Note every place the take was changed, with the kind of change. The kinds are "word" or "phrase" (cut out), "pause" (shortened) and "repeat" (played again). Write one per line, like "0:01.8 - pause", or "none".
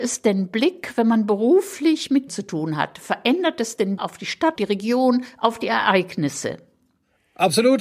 0:02.3 - word
0:04.0 - word
0:04.6 - word

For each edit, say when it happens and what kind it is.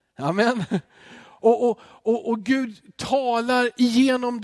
none

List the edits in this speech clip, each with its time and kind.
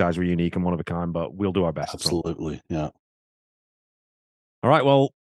none

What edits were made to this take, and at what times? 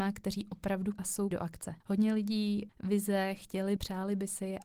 0:00.9 - word
0:01.3 - word
0:01.8 - pause
0:02.7 - phrase
0:03.8 - word

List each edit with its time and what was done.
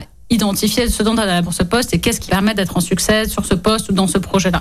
0:01.4 - word
0:02.3 - word

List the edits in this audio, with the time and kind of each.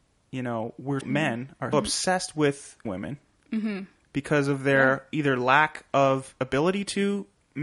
0:01.0 - word
0:01.7 - word
0:02.8 - word

